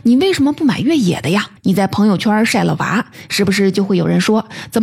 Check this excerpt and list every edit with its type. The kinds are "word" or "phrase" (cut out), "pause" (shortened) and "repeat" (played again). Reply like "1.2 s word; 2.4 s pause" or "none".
1.6 s pause